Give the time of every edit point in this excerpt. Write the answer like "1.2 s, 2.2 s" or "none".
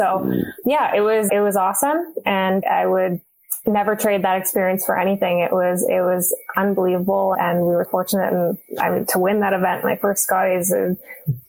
1.3 s, 2.6 s, 7.3 s, 7.8 s